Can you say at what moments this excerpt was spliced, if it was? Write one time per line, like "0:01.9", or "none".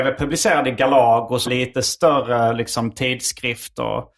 0:01.4